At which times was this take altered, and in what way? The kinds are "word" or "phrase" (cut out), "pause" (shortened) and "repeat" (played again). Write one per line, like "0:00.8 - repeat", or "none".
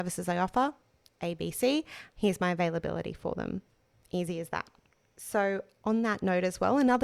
none